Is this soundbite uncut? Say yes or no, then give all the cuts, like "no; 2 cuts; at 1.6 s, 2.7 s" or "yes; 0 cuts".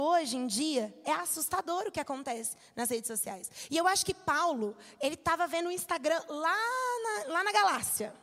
yes; 0 cuts